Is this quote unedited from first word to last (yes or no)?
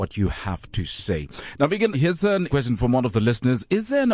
no